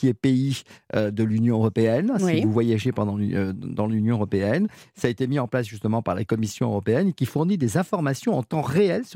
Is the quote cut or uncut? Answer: uncut